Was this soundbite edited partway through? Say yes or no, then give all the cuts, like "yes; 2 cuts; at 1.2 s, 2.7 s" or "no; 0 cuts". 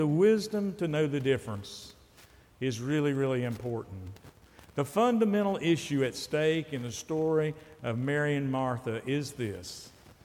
no; 0 cuts